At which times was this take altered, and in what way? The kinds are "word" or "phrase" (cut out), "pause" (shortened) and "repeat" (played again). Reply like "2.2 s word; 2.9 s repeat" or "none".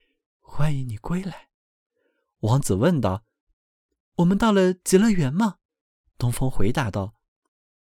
5.7 s pause